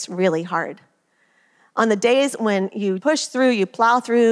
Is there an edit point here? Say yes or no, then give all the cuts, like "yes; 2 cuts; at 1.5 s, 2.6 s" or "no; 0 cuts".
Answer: yes; 1 cut; at 3.0 s